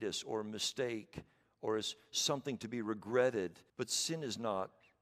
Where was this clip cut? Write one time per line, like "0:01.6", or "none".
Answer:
0:03.7